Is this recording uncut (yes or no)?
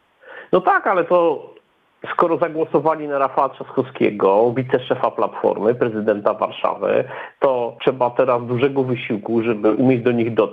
no